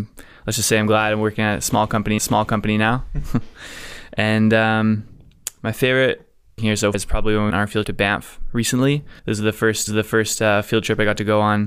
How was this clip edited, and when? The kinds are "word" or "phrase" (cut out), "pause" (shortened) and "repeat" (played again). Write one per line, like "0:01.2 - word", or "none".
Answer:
0:02.2 - repeat
0:06.6 - phrase
0:06.9 - word
0:07.5 - word
0:07.8 - word
0:09.2 - pause
0:09.9 - repeat